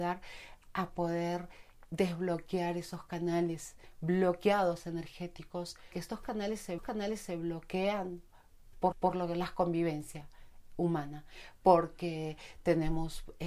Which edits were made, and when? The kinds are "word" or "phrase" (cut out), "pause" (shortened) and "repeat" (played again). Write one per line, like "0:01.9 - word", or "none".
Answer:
0:05.9 - word
0:06.8 - repeat
0:08.9 - repeat

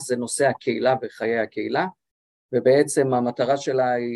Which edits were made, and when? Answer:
none

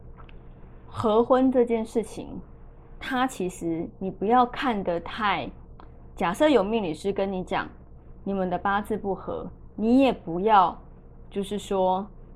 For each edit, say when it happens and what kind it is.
0:06.1 - word

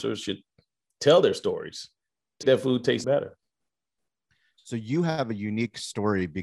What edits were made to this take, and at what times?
0:02.4 - word
0:03.0 - word

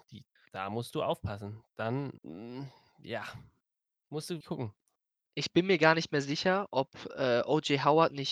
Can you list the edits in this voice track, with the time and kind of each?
0:02.2 - pause
0:04.4 - word

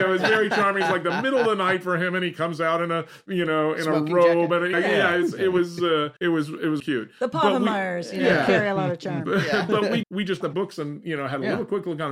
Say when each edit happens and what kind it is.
0:04.7 - word
0:06.2 - pause
0:06.8 - word
0:10.0 - word
0:10.4 - word

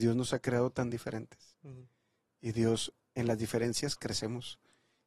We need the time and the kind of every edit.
none

